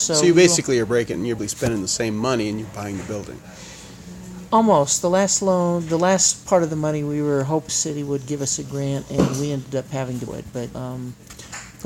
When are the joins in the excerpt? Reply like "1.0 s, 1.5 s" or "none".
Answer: 1.4 s, 7.7 s, 10.3 s, 10.7 s